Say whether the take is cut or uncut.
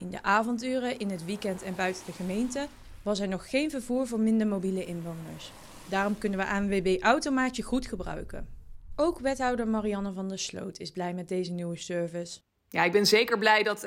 uncut